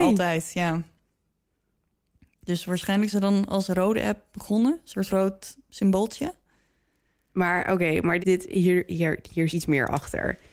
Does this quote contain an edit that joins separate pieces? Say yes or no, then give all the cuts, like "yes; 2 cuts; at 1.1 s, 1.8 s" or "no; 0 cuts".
yes; 4 cuts; at 3.1 s, 5.1 s, 8.2 s, 9.5 s